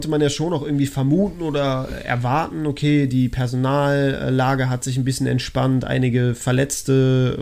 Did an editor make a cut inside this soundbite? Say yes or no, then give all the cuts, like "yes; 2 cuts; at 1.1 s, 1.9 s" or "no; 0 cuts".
no; 0 cuts